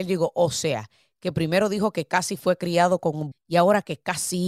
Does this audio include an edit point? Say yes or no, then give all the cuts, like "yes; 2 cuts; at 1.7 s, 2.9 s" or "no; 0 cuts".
yes; 1 cut; at 3.3 s